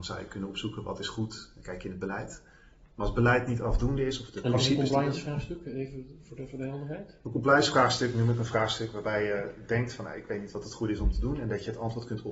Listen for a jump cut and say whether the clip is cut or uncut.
uncut